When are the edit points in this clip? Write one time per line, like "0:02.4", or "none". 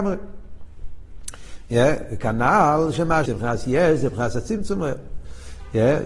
0:03.3